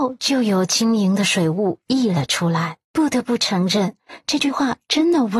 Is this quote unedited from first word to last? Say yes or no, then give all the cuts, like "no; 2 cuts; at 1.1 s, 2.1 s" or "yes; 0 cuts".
no; 1 cut; at 2.8 s